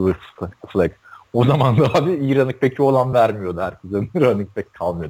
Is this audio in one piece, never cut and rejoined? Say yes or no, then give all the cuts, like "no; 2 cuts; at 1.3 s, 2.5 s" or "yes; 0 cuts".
yes; 0 cuts